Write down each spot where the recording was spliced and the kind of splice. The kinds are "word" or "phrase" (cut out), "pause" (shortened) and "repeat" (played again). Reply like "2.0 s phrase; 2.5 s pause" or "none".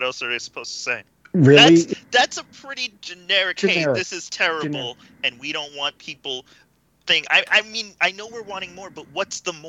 1.1 s pause; 3.0 s pause